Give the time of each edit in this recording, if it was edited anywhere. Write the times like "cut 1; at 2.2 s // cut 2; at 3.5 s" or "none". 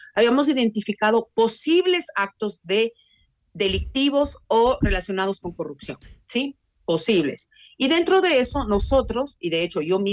none